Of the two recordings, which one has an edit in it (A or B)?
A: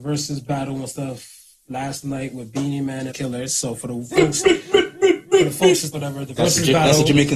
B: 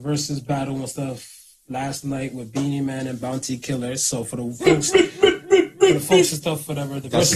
A